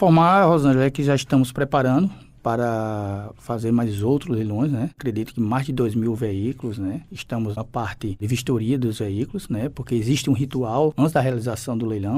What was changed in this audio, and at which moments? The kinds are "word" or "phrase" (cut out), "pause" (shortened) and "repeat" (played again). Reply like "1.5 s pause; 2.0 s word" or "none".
7.6 s word